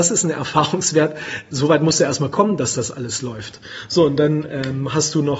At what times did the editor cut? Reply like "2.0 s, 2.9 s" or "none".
none